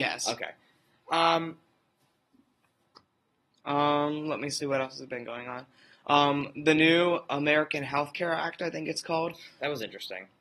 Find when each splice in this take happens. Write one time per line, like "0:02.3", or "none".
none